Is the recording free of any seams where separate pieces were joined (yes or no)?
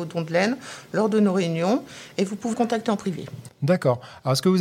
no